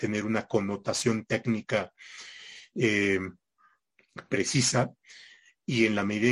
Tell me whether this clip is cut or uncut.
uncut